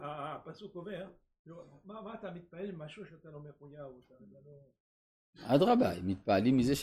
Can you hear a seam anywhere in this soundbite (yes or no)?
no